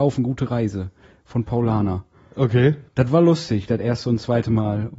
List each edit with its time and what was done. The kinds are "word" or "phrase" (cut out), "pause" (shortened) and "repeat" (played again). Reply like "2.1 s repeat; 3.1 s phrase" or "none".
2.9 s pause